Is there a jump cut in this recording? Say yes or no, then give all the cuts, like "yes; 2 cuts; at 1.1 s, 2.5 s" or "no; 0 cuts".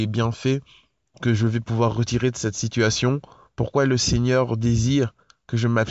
no; 0 cuts